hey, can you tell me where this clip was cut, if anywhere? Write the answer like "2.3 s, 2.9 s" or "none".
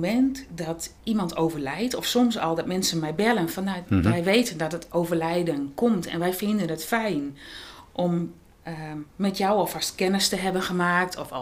1.0 s

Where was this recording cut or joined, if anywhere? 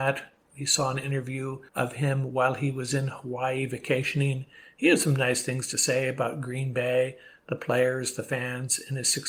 1.7 s

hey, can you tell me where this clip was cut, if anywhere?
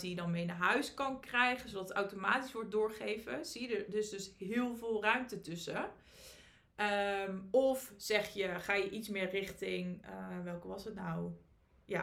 none

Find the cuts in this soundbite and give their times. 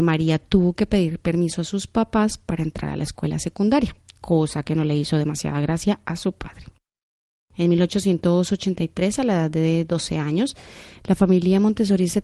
none

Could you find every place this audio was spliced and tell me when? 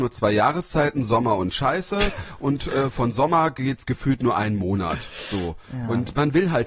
none

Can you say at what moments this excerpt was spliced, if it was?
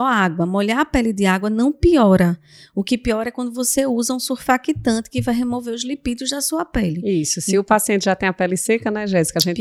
none

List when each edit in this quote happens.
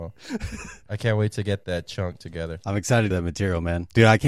3.1 s

